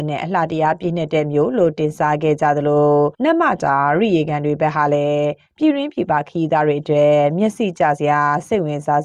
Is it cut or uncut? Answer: cut